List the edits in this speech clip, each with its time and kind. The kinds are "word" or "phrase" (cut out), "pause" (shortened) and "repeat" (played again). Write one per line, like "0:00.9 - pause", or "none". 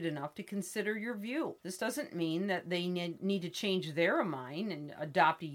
0:01.6 - pause